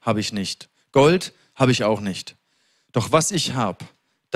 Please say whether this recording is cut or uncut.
uncut